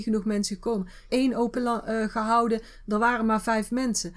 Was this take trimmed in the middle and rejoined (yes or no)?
yes